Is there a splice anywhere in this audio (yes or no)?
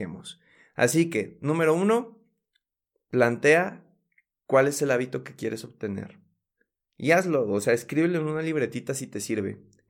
no